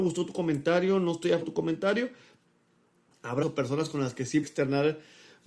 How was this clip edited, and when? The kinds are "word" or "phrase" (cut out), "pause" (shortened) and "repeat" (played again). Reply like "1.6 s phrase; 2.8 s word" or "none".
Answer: 1.4 s word; 3.4 s word; 4.4 s word